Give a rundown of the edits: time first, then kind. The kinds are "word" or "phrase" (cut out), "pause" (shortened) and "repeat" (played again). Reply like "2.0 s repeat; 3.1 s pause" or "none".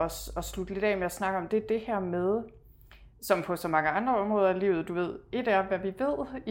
none